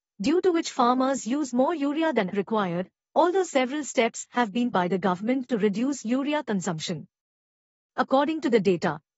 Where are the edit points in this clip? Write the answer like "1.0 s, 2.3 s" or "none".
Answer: 2.3 s, 4.7 s